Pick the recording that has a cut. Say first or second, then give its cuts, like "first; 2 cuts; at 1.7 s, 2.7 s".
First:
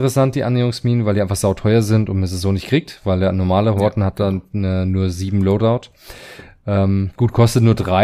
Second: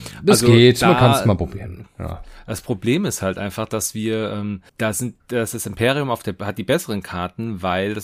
second; 2 cuts; at 4.7 s, 5.2 s